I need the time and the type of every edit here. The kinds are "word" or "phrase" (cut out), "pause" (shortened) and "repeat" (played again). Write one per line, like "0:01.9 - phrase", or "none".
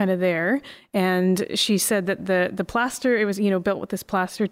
none